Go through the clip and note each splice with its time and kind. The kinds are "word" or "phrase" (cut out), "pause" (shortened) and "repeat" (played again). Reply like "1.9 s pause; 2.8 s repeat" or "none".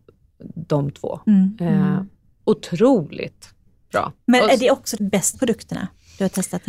5.0 s word; 5.3 s word